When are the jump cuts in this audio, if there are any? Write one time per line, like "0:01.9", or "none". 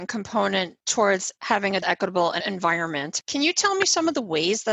0:01.8
0:02.4